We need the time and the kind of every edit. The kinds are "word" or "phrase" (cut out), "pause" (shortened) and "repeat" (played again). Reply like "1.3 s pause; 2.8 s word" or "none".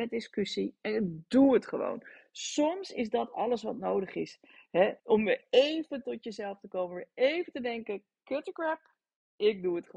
5.0 s pause